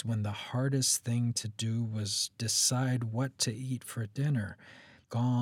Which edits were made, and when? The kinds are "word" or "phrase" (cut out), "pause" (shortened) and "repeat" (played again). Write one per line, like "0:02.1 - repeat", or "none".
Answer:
none